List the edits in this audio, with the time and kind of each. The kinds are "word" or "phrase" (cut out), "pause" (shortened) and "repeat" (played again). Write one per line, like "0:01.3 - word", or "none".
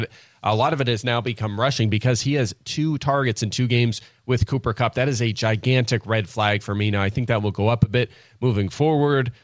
none